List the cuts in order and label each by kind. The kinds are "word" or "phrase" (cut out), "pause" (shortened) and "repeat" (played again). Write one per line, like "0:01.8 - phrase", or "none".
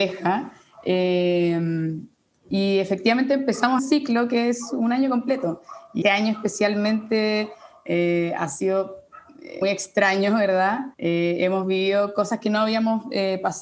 0:03.8 - phrase
0:06.0 - word
0:09.6 - word
0:10.9 - pause

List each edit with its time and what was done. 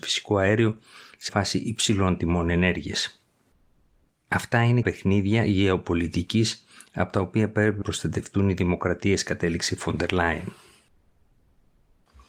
0:01.3 - word
0:04.8 - word
0:07.8 - word

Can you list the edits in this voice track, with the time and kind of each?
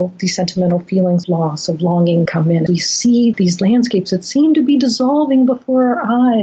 0:01.2 - word
0:02.3 - word
0:02.7 - word
0:03.3 - word

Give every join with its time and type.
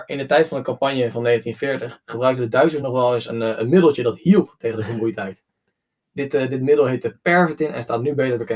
none

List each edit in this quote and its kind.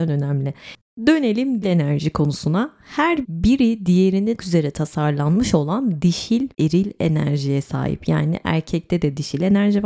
0:01.6 - word
0:03.2 - word
0:04.4 - word
0:06.5 - word

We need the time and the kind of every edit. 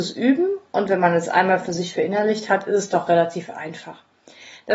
none

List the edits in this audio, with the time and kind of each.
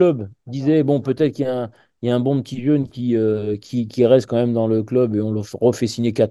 none

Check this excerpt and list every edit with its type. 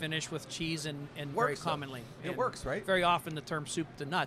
0:01.3 - phrase

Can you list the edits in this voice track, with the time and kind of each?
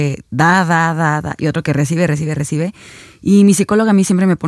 none

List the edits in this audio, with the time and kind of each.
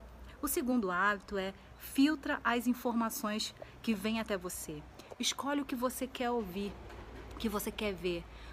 none

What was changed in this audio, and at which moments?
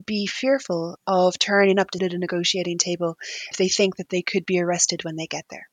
0:02.0 - word
0:03.5 - word

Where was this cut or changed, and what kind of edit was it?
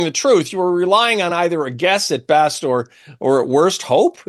none

